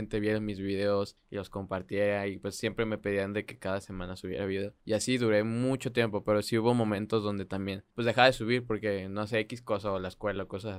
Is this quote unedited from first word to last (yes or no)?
no